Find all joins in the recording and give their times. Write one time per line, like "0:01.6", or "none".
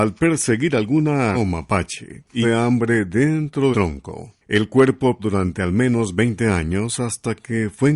0:01.3
0:02.4
0:03.7
0:05.2